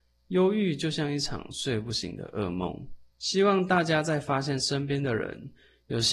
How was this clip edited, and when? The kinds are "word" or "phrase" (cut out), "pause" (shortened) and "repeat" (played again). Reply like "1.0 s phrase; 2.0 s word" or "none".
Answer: 3.1 s pause